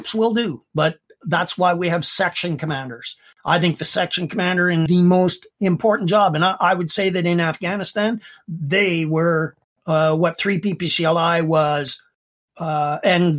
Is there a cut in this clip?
yes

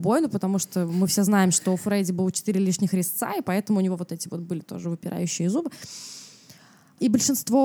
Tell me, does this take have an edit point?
no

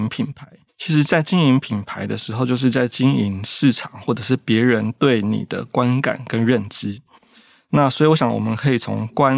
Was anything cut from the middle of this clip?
no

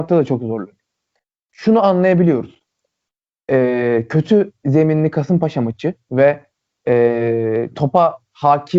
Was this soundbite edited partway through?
no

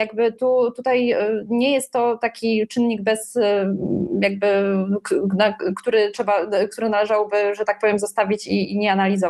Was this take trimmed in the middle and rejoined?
no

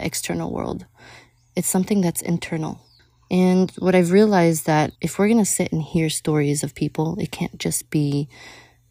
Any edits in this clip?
yes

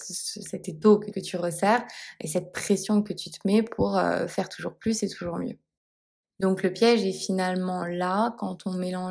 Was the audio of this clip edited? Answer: yes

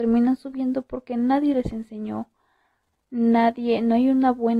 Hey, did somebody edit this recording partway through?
no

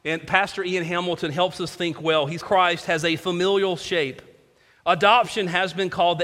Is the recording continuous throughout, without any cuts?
no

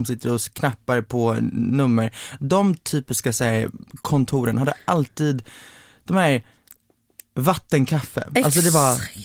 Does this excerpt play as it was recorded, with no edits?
yes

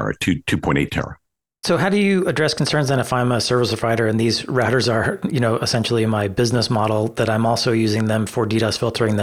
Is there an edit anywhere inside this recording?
no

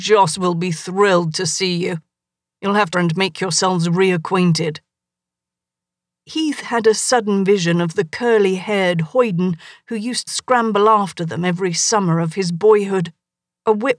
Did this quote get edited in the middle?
yes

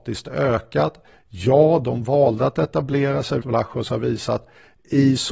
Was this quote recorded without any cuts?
no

